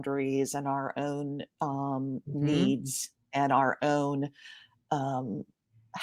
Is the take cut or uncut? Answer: uncut